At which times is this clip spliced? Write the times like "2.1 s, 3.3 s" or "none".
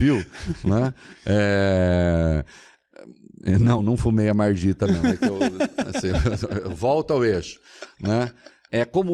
none